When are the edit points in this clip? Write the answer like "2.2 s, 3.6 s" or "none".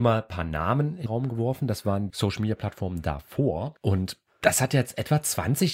1.1 s, 2.1 s

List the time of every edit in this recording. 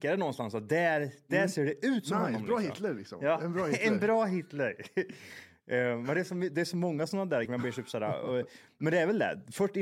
7.4 s

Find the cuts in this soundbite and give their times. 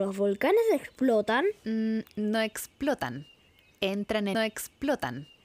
4.3 s

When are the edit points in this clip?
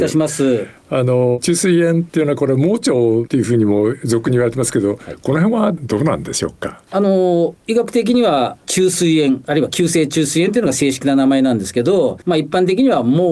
12.2 s

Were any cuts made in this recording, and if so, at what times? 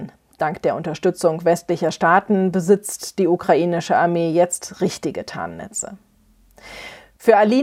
none

